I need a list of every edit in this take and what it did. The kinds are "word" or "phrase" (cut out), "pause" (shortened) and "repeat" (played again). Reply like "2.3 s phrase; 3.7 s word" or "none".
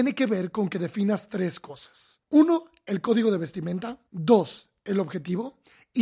2.2 s pause; 4.1 s pause